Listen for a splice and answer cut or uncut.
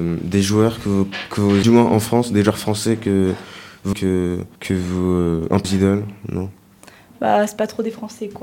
cut